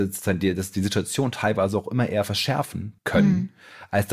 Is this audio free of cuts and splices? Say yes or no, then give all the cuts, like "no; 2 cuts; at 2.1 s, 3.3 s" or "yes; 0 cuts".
no; 1 cut; at 3.0 s